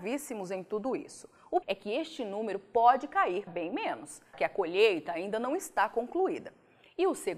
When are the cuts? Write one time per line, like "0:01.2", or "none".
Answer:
0:01.6
0:03.5
0:04.3